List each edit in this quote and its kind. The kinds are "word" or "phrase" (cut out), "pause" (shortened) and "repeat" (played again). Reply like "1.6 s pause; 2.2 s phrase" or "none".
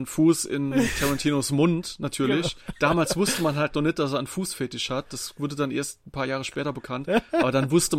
2.6 s pause